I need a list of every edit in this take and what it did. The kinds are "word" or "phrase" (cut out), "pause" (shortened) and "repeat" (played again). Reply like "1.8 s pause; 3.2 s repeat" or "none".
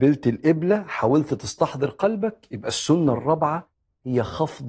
none